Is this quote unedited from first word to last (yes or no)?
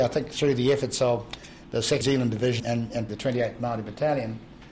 no